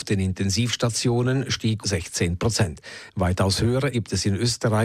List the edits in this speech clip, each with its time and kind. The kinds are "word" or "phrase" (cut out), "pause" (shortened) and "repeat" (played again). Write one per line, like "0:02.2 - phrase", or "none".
0:01.8 - word
0:03.9 - word

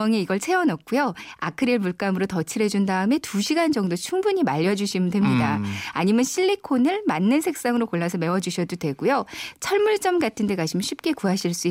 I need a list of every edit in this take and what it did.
none

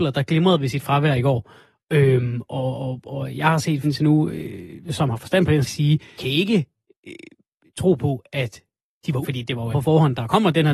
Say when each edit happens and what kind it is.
0:02.5 - word
0:03.8 - word
0:05.6 - word
0:06.2 - word
0:09.2 - word
0:09.7 - word

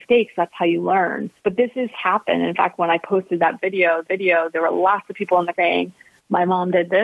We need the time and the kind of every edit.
0:01.4 - pause
0:01.9 - phrase
0:04.1 - repeat
0:05.5 - word

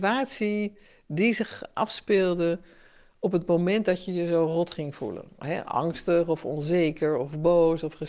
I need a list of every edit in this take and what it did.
none

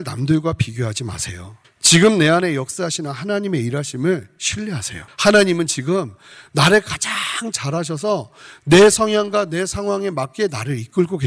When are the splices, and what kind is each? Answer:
0:01.6 - pause
0:05.1 - pause

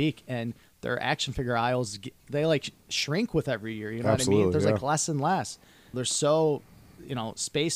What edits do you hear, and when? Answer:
0:05.9 - word

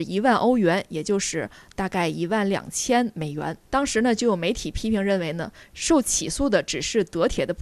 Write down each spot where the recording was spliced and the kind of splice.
0:03.6 - pause

